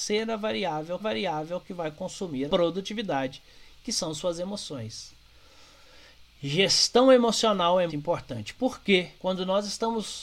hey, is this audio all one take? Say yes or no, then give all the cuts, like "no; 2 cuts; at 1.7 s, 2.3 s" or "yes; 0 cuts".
no; 4 cuts; at 1.0 s, 2.5 s, 7.9 s, 9.1 s